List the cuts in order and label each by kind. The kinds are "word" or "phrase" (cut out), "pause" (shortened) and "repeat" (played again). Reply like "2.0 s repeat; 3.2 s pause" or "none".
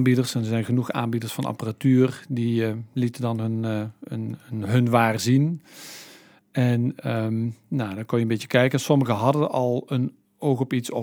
none